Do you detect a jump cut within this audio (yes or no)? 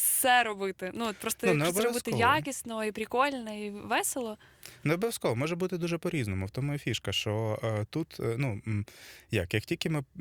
no